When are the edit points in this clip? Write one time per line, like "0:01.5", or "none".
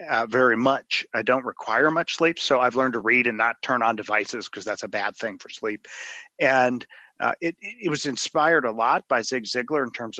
none